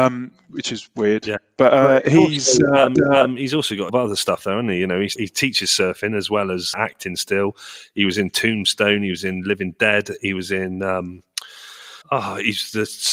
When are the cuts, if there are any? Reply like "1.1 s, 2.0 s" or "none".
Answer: 3.0 s, 3.9 s, 5.2 s, 6.7 s, 12.0 s